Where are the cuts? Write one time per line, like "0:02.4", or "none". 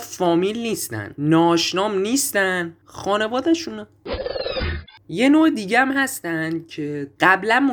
none